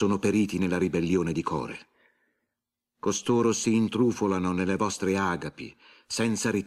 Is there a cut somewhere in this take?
no; 0 cuts

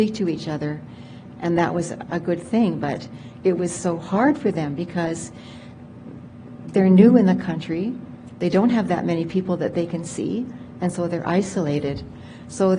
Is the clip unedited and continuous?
no; 1 cut; at 2.1 s

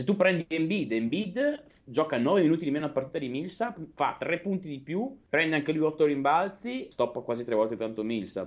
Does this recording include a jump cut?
no; 0 cuts

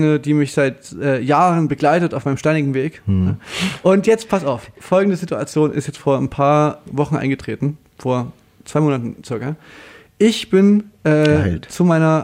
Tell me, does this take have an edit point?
no; 0 cuts

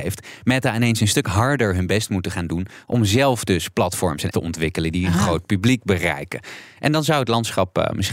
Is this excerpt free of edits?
no; 1 cut; at 4.3 s

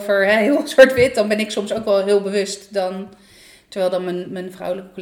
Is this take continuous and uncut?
yes; 0 cuts

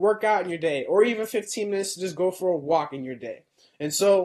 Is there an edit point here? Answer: no; 0 cuts

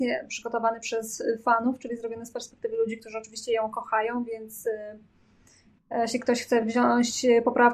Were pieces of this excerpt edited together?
no; 0 cuts

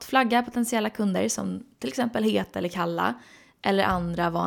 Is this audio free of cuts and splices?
yes; 0 cuts

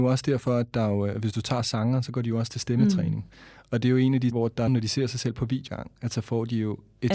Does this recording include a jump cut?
yes; 3 cuts; at 4.3 s, 4.7 s, 5.7 s

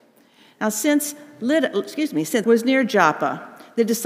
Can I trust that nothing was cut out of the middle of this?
no; 1 cut; at 2.4 s

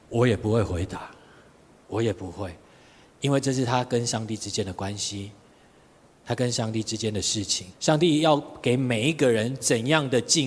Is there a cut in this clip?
yes; 1 cut; at 7.7 s

